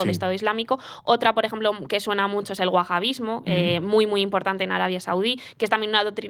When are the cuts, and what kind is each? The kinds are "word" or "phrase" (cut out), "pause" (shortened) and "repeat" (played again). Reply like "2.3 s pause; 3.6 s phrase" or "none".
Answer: none